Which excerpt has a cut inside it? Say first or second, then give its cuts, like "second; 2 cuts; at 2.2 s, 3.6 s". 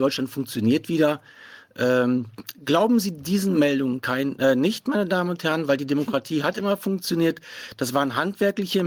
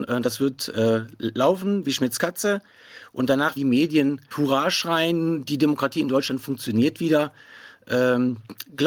second; 2 cuts; at 3.6 s, 4.3 s